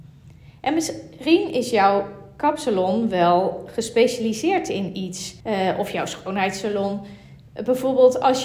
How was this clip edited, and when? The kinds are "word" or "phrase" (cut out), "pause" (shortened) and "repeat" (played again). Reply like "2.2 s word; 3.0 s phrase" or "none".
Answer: 5.4 s pause